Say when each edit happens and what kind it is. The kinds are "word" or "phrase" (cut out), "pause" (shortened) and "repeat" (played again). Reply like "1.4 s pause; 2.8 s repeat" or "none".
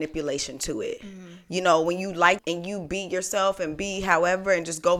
2.4 s word

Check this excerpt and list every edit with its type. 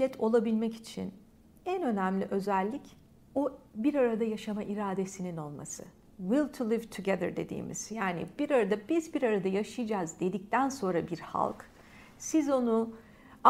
none

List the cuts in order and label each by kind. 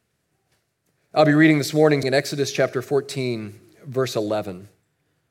2.0 s word

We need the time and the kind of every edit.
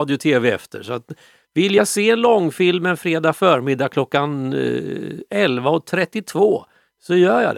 none

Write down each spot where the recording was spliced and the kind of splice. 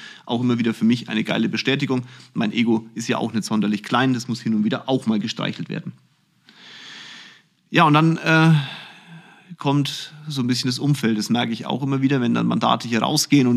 none

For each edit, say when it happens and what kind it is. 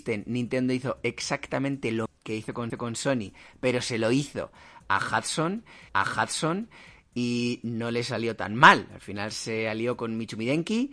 2.1 s word; 2.7 s repeat; 5.9 s repeat

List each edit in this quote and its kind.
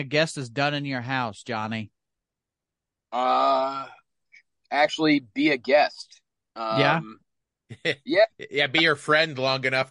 none

